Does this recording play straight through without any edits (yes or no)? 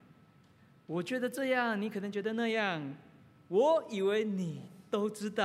yes